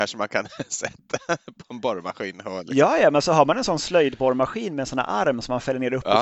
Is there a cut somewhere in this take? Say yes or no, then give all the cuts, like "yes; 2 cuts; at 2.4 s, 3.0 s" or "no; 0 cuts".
no; 0 cuts